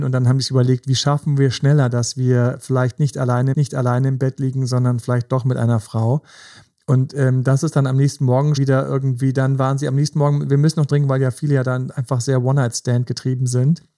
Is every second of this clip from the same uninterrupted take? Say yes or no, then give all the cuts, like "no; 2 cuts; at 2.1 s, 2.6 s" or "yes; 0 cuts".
no; 3 cuts; at 3.5 s, 8.6 s, 10.9 s